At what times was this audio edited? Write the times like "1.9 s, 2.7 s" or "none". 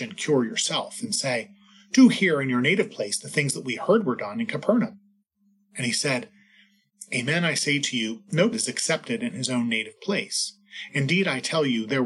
8.5 s